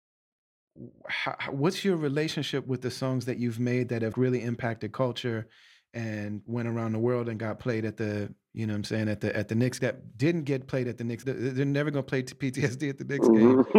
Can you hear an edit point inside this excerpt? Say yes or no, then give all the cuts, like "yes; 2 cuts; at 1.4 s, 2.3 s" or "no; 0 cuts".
yes; 3 cuts; at 4.1 s, 9.8 s, 11.2 s